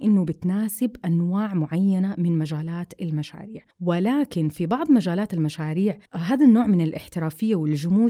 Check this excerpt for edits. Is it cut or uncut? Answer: cut